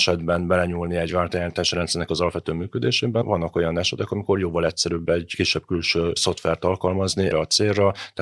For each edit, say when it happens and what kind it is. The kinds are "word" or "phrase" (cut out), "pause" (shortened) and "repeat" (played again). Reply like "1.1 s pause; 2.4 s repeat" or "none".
7.3 s word